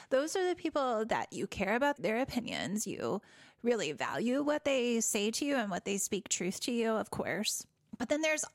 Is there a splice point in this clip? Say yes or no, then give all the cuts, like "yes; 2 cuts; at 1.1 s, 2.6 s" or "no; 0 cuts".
no; 0 cuts